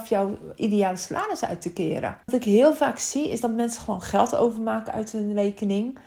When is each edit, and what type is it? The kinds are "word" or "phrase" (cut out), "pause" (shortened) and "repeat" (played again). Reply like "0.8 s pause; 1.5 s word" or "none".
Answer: 2.2 s pause